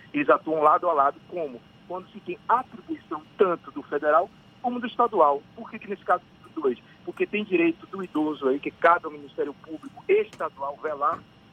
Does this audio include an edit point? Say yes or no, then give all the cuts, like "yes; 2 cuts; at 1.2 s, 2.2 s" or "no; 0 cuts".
no; 0 cuts